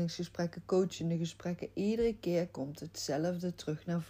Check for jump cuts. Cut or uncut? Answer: uncut